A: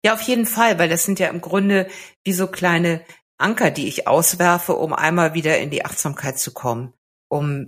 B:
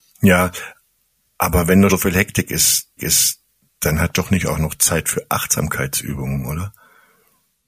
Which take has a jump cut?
B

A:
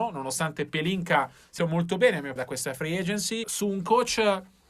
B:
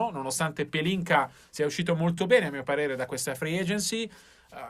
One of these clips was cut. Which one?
A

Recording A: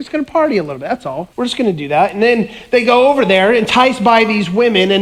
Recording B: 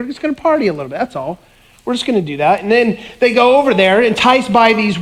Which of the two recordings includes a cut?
A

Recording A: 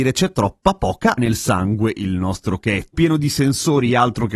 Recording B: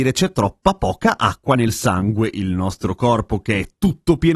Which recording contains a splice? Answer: A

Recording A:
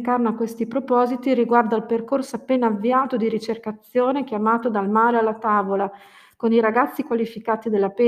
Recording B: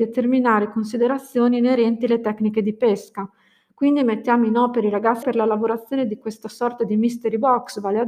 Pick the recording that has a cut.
B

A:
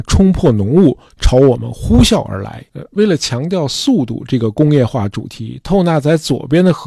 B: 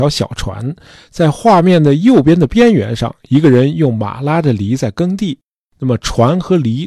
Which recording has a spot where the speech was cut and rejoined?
A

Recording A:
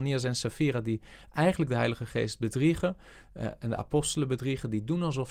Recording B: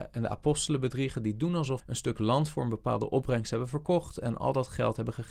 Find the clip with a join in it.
B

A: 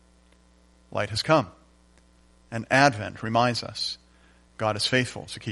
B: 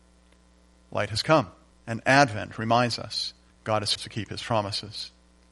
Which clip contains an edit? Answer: B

